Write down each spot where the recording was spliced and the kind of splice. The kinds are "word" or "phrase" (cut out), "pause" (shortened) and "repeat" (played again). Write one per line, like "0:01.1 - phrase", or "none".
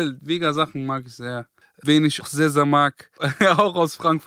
0:01.6 - pause
0:02.2 - word